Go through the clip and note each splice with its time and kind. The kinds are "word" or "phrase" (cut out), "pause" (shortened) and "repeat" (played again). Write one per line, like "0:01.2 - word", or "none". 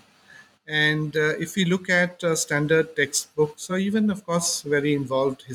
none